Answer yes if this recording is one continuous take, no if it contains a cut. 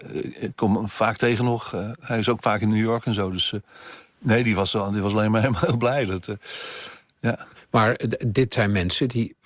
yes